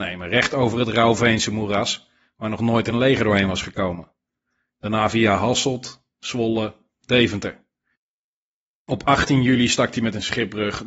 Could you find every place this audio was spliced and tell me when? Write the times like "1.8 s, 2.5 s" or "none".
none